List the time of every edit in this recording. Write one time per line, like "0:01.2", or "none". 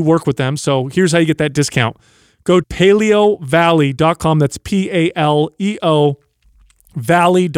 0:02.6